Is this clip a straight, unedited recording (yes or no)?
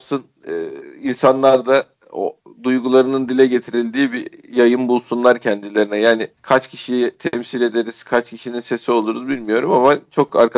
no